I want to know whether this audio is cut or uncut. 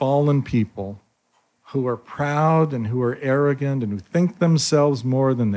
uncut